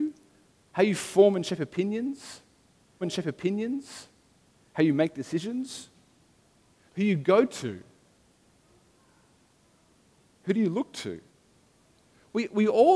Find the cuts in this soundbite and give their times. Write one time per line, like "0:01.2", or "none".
0:03.0

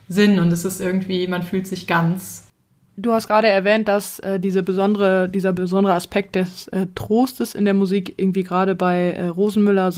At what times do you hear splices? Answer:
none

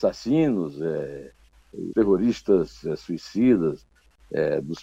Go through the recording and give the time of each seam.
0:01.9

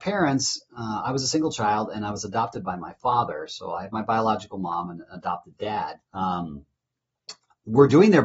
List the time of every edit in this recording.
0:06.0

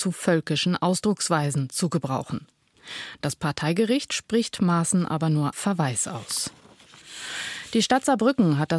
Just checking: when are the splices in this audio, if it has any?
0:05.5

